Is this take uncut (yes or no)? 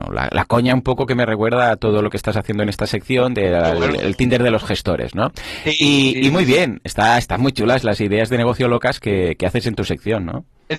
yes